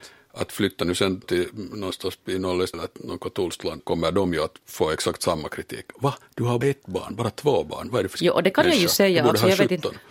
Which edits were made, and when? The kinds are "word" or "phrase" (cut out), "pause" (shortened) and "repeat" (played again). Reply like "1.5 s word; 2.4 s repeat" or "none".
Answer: 1.2 s word; 2.7 s word; 3.8 s word; 6.6 s word; 8.1 s word